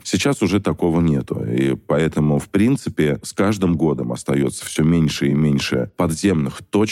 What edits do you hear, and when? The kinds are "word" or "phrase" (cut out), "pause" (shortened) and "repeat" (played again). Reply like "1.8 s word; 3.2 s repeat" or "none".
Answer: none